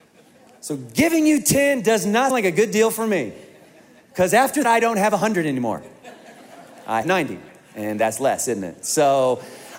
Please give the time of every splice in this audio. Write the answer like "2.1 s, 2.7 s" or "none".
2.3 s, 4.6 s, 7.0 s